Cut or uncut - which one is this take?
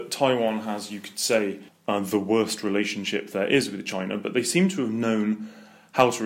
cut